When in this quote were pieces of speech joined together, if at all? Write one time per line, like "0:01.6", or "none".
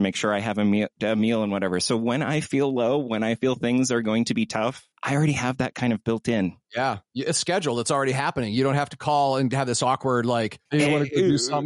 0:04.9
0:10.7